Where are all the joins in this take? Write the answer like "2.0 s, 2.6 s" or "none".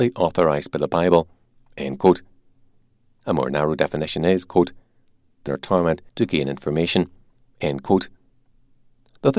5.5 s, 6.1 s